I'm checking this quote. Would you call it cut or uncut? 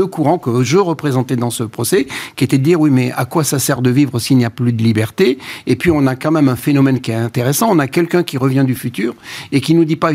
uncut